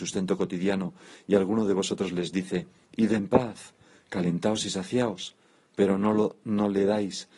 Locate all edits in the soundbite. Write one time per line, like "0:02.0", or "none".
none